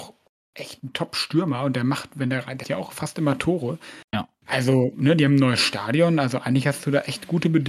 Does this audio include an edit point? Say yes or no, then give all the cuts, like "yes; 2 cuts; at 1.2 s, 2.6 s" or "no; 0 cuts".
yes; 2 cuts; at 2.6 s, 4.1 s